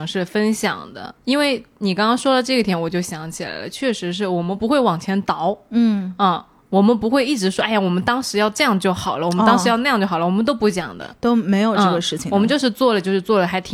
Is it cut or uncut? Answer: cut